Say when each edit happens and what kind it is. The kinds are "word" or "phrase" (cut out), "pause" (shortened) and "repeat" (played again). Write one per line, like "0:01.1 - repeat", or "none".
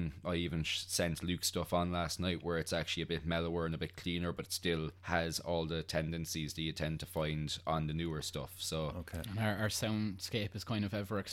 0:05.0 - pause